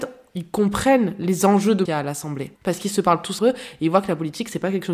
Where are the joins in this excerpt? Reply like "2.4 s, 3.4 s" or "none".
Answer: 1.9 s, 2.6 s, 3.4 s